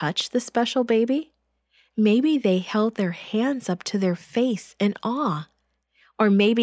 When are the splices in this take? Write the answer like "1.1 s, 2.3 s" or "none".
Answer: none